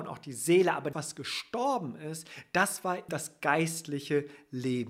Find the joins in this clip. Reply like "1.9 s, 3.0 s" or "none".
0.9 s, 3.1 s